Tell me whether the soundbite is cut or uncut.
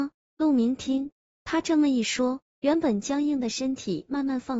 uncut